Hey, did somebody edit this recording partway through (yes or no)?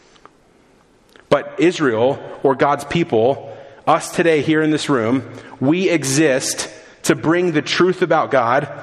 no